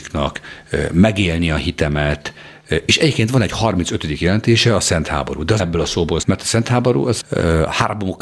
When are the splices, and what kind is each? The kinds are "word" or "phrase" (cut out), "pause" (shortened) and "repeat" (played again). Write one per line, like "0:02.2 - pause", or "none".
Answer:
0:05.6 - word
0:06.2 - word
0:07.2 - word

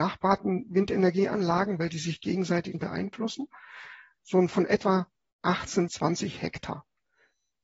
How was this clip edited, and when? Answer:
0:02.7 - word
0:04.5 - word
0:05.9 - word

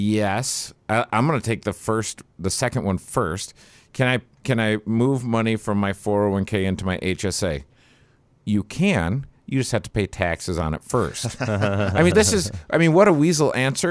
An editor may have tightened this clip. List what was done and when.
0:12.1 - word

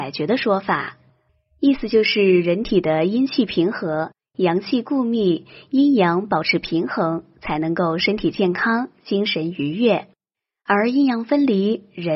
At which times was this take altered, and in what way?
none

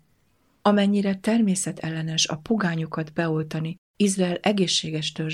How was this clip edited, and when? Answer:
0:03.8 - pause

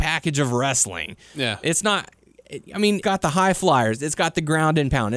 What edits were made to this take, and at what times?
0:03.0 - word

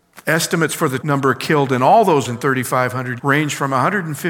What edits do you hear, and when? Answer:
0:01.0 - word
0:02.2 - word
0:03.2 - word

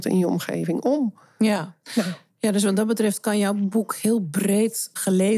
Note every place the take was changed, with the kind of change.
none

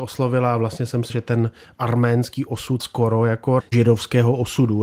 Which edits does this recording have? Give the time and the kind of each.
0:01.1 - word
0:02.8 - word
0:03.6 - word

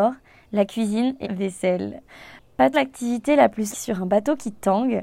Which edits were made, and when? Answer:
0:01.2 - word
0:02.7 - word
0:03.7 - word

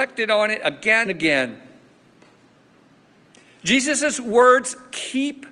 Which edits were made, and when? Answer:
0:01.1 - phrase

